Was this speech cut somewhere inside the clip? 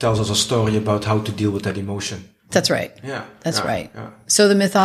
no; 0 cuts

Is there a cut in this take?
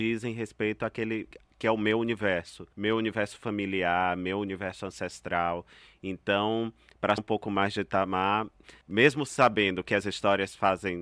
yes; 3 cuts; at 2.7 s, 7.2 s, 8.8 s

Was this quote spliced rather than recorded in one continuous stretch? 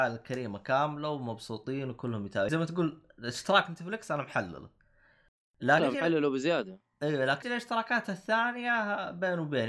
yes; 3 cuts; at 2.5 s, 5.8 s, 7.4 s

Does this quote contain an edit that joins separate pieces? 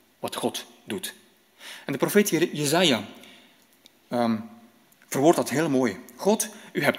no; 0 cuts

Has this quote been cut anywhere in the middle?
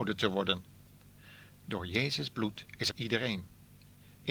yes; 1 cut; at 2.9 s

